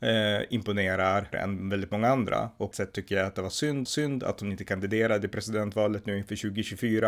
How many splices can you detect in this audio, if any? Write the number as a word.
three